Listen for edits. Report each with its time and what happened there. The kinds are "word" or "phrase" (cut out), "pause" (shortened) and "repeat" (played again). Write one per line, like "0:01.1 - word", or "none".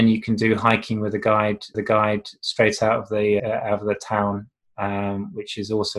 0:01.7 - repeat
0:03.4 - word